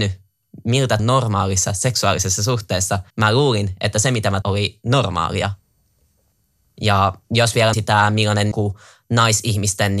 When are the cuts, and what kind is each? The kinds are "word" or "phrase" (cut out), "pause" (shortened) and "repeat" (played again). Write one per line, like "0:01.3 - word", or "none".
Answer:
0:01.0 - phrase
0:03.1 - pause
0:04.4 - word
0:07.2 - pause
0:07.7 - word
0:08.5 - word